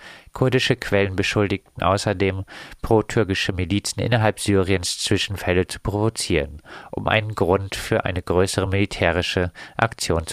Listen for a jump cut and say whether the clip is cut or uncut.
uncut